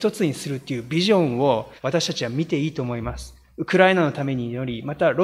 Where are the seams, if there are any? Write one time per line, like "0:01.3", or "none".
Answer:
0:01.8